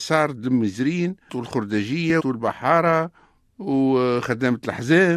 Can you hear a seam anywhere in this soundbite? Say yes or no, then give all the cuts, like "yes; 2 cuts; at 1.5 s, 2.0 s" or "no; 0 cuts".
yes; 2 cuts; at 1.3 s, 2.2 s